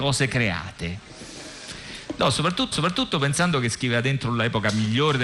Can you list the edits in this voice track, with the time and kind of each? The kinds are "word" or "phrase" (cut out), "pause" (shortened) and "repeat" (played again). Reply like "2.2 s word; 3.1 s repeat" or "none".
2.7 s repeat